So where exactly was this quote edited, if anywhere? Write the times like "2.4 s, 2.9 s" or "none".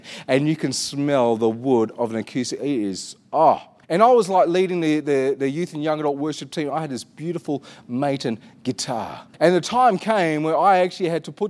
3.8 s, 9.3 s